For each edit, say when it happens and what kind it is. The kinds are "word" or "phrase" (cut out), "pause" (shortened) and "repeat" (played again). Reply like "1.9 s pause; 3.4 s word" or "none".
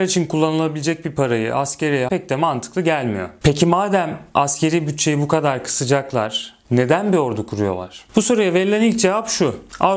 2.1 s word